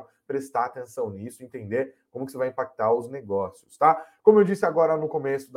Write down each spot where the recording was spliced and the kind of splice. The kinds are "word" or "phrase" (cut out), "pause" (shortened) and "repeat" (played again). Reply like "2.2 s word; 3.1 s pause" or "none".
none